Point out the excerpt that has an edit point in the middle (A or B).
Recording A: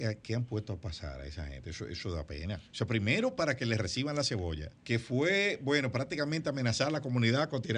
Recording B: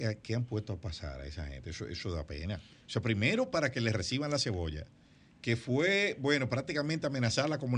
A